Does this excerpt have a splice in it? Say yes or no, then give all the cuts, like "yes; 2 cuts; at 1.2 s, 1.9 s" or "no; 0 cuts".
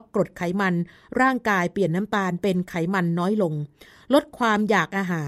no; 0 cuts